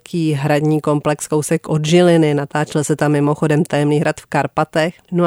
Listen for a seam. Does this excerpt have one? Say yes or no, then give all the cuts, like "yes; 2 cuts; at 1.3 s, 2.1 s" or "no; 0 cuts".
no; 0 cuts